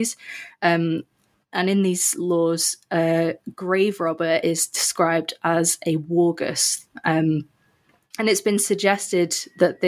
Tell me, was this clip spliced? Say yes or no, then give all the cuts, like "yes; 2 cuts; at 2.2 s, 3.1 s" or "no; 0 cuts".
no; 0 cuts